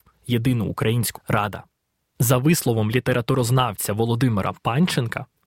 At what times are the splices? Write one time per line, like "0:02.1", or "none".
0:01.1